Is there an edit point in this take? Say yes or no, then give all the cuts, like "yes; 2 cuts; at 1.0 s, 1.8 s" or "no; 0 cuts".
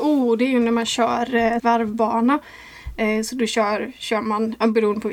yes; 1 cut; at 1.6 s